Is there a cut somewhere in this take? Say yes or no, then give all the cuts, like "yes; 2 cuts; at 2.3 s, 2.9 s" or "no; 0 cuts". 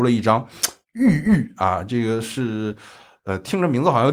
no; 0 cuts